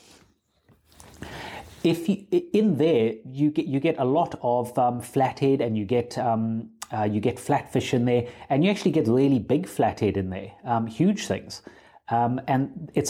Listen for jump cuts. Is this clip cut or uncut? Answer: uncut